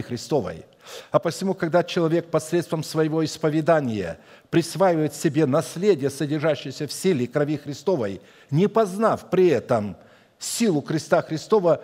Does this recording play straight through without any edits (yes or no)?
yes